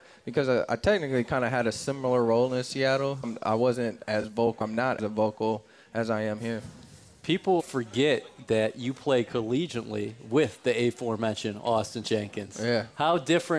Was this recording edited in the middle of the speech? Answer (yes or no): yes